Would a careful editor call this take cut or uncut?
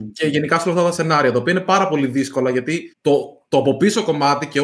cut